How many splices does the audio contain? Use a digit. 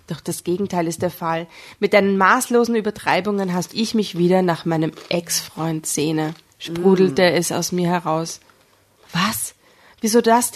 1